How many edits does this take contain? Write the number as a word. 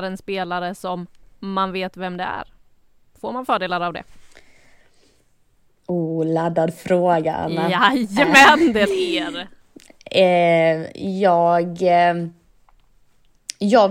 one